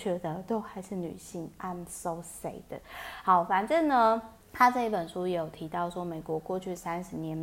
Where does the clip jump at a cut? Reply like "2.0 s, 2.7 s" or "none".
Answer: 4.4 s